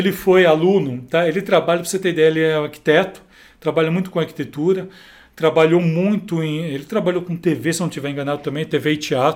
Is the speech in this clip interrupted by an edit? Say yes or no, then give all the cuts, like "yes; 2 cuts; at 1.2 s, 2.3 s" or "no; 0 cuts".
no; 0 cuts